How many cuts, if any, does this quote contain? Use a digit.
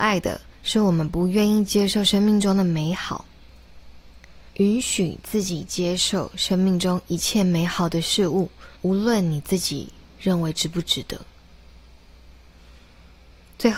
2